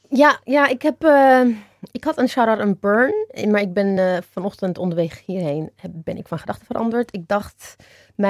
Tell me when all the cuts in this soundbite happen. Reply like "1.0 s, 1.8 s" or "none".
none